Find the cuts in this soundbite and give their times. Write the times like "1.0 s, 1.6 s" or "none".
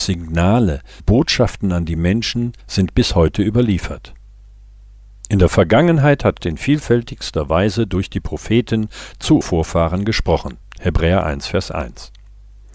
1.0 s, 2.6 s, 6.4 s, 9.4 s, 10.6 s